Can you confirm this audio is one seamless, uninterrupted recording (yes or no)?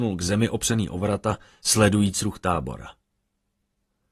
yes